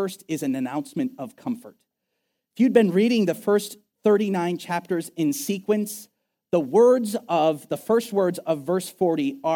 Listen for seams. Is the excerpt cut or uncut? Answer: uncut